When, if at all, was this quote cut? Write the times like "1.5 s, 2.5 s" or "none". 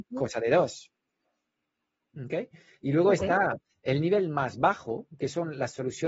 none